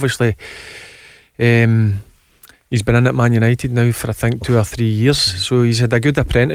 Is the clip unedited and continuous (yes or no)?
yes